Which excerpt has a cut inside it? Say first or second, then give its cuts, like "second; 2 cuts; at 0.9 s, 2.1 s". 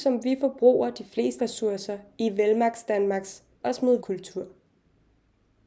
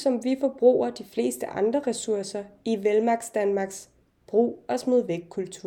first; 3 cuts; at 1.4 s, 3.6 s, 4.0 s